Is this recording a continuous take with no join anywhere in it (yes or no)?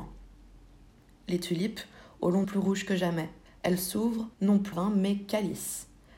no